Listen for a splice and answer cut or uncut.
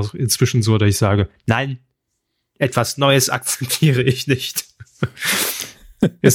uncut